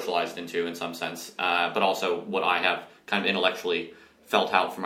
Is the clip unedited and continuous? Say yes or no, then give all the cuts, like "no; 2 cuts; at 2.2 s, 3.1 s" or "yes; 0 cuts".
yes; 0 cuts